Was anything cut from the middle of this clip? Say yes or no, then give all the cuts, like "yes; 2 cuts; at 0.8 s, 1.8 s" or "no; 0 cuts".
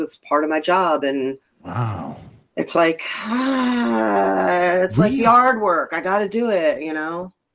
no; 0 cuts